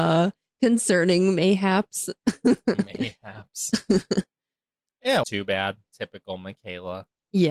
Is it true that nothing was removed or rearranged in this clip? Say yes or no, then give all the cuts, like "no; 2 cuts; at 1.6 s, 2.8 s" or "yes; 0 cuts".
no; 2 cuts; at 5.2 s, 5.9 s